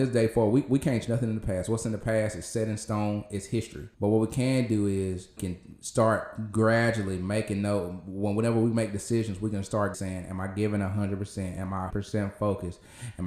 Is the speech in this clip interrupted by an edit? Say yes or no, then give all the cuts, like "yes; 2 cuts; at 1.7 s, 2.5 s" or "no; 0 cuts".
yes; 5 cuts; at 1.0 s, 3.9 s, 5.4 s, 9.9 s, 11.9 s